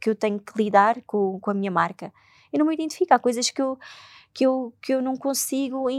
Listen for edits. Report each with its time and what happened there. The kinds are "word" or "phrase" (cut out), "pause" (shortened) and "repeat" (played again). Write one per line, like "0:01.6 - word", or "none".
none